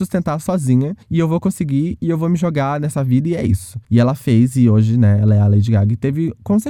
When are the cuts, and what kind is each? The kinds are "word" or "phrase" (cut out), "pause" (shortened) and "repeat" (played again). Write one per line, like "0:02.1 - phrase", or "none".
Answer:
0:01.0 - pause
0:03.8 - pause